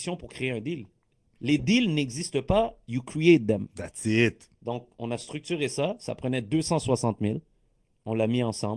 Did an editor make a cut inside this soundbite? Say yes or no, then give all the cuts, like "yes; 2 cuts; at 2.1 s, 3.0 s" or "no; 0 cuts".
no; 0 cuts